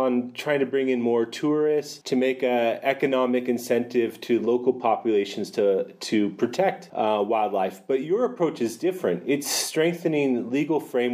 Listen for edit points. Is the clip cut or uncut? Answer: uncut